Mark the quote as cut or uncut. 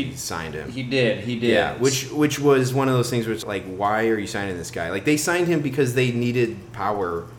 cut